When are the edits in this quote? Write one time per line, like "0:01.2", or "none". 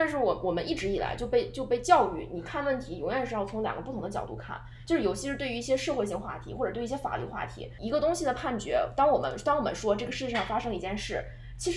0:07.8